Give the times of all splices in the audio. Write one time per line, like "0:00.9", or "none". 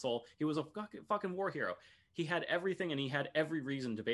none